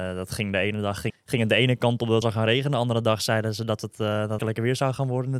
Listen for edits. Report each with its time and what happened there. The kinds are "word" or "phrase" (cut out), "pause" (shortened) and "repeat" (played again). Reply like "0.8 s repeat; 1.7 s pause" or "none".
1.1 s word; 2.2 s word; 4.4 s word